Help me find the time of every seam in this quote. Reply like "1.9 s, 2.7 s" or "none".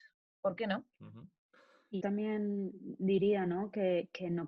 0.9 s, 2.0 s